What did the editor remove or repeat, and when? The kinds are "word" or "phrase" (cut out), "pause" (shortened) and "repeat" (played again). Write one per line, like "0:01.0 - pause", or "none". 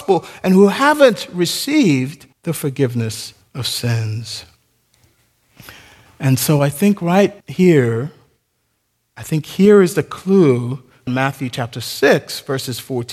0:02.3 - pause
0:03.4 - pause
0:07.4 - pause
0:11.1 - phrase